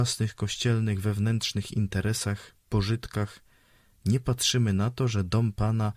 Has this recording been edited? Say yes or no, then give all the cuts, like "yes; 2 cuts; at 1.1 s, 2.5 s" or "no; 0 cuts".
no; 0 cuts